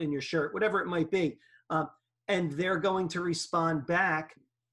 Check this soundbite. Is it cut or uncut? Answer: uncut